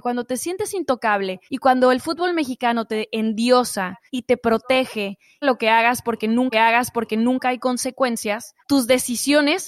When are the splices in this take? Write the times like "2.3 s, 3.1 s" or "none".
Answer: 1.5 s, 4.1 s, 5.4 s, 6.5 s, 8.6 s